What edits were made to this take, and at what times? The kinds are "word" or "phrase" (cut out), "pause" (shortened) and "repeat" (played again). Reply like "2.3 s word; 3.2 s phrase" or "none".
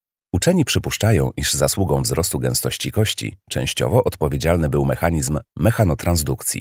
none

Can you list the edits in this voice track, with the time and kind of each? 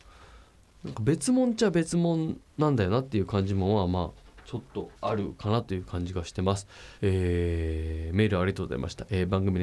5.0 s pause; 7.0 s pause

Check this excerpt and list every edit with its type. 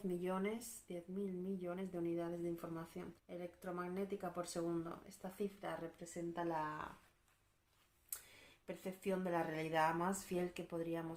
3.2 s pause

